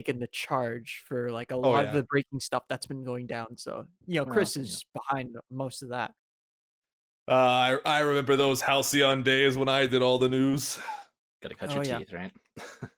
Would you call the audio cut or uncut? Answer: uncut